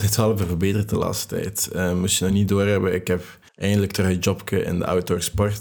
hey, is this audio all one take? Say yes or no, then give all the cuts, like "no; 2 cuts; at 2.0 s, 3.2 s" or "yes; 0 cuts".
no; 1 cut; at 3.5 s